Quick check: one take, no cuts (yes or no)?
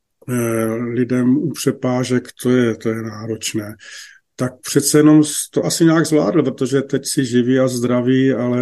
yes